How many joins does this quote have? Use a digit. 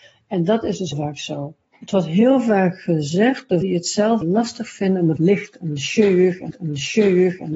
6